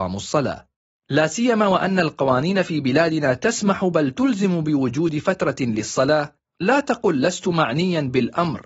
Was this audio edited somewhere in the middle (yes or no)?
no